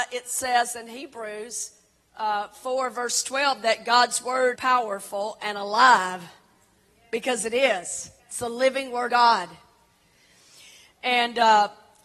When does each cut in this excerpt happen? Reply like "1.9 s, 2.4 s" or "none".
4.5 s, 8.2 s, 9.1 s

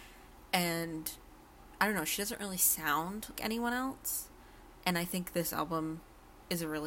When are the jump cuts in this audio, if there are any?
3.4 s

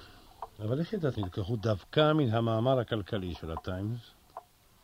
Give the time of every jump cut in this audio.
1.1 s

